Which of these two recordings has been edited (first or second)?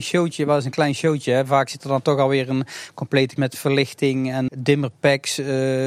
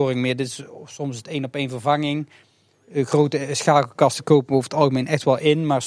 first